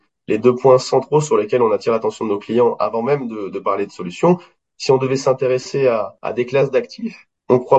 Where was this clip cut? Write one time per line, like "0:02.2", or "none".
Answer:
none